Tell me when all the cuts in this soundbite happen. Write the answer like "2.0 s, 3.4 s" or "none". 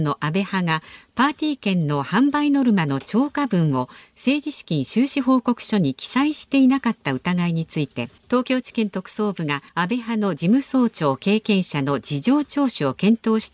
8.2 s, 9.7 s

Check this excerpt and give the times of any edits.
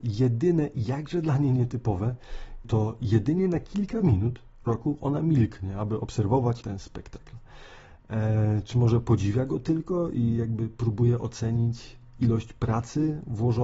2.6 s, 4.7 s, 6.6 s, 8.7 s

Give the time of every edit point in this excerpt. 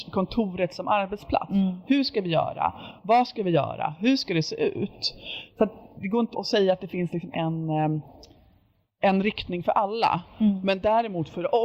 6.3 s, 7.3 s

